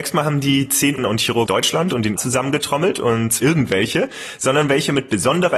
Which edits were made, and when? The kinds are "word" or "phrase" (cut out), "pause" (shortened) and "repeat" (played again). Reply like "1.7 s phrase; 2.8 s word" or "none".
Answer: 1.0 s word; 1.5 s word; 2.2 s word; 3.4 s word